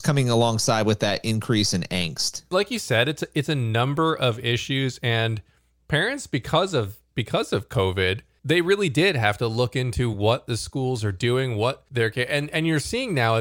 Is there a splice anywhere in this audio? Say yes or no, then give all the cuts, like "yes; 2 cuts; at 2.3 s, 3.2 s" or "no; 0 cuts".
no; 0 cuts